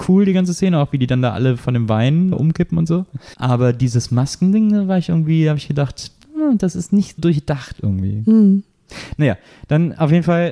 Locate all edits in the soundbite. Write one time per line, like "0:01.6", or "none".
0:02.3
0:03.3
0:07.2